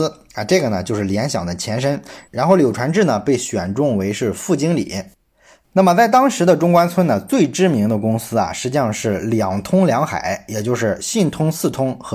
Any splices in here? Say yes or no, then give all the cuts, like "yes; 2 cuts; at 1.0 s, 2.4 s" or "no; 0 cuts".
no; 0 cuts